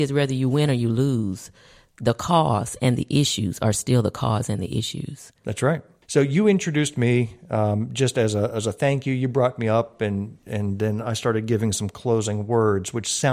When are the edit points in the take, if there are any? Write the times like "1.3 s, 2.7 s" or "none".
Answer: none

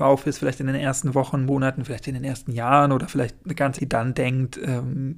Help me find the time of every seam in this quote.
3.8 s

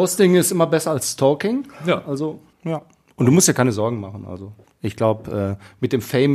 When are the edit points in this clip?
2.5 s, 4.6 s

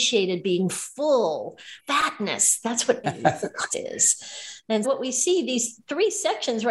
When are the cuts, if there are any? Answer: 1.8 s, 3.0 s, 3.7 s, 4.8 s

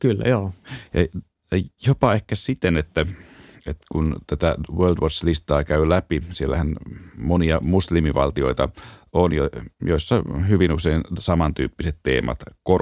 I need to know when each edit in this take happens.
none

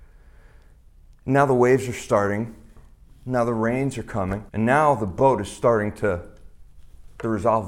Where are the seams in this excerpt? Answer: 4.5 s

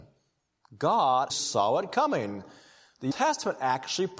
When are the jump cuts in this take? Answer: 1.3 s, 3.1 s

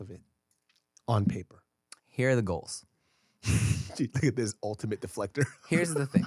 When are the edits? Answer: 2.0 s, 4.1 s

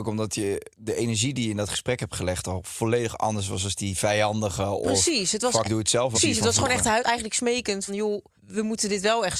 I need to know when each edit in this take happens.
5.6 s, 6.1 s, 7.0 s, 7.9 s, 8.4 s

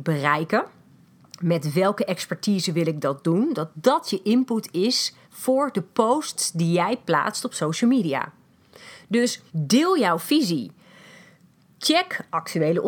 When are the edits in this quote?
5.2 s, 9.5 s

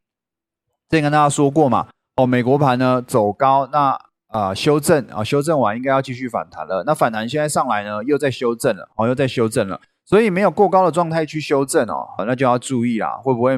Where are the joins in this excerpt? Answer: 12.2 s

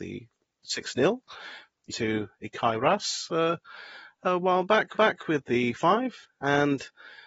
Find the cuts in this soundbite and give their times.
1.9 s, 4.9 s, 5.7 s

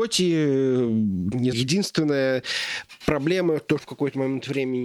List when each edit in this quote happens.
1.5 s, 3.8 s

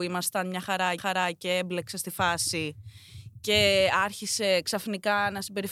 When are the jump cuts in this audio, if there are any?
1.0 s

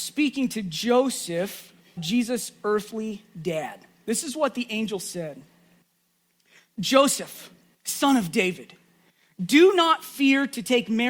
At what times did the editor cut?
2.0 s

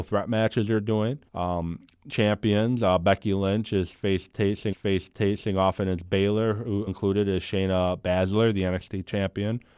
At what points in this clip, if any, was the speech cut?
1.3 s, 2.1 s, 4.7 s, 6.9 s

